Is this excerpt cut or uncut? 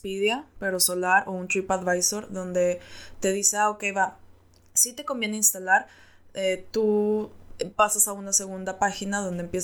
uncut